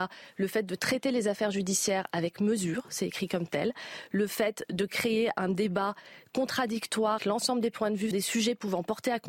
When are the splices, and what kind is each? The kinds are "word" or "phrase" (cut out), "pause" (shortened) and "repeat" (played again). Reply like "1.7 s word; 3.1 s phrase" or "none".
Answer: 7.2 s word; 8.1 s word